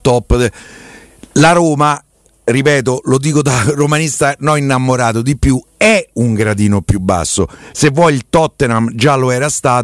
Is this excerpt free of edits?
yes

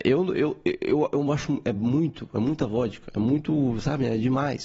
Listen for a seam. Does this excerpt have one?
no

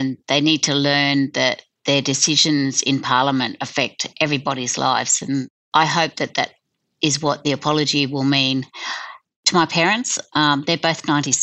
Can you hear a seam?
no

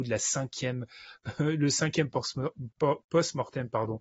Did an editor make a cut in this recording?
no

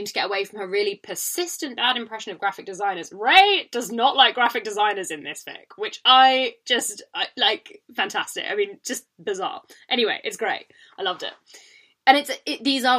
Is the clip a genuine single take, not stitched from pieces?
yes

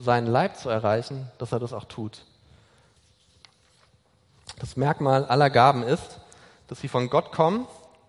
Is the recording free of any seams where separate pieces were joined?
yes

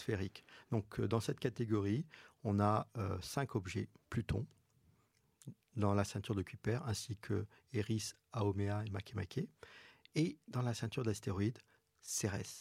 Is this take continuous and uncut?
yes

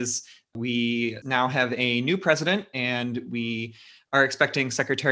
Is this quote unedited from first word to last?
yes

